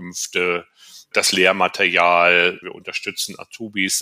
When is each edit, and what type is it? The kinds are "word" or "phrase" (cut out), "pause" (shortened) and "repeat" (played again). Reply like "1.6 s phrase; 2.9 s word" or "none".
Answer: 1.1 s word; 2.6 s word